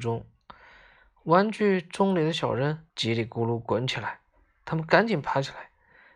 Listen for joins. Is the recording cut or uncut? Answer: cut